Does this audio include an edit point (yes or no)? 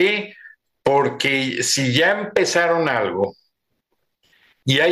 no